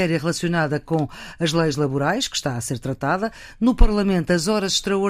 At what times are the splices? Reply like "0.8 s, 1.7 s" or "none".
none